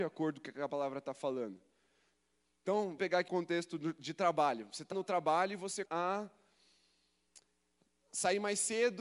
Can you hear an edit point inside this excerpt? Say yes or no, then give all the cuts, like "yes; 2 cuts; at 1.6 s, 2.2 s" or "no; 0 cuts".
yes; 4 cuts; at 3.0 s, 3.3 s, 4.9 s, 5.8 s